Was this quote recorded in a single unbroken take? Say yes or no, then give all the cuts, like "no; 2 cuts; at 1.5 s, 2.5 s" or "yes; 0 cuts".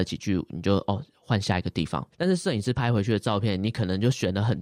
no; 1 cut; at 2.1 s